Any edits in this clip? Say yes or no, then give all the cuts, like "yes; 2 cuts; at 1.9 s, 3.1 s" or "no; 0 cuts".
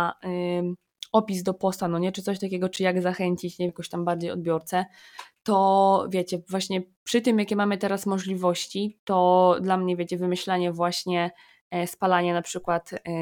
yes; 1 cut; at 3.7 s